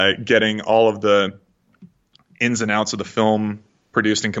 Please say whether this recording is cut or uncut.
uncut